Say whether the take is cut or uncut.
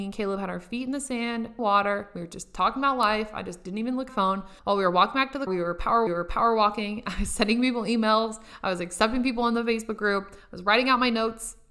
cut